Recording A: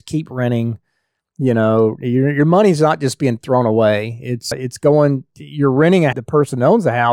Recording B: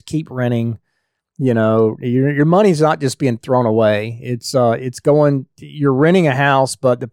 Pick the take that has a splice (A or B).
A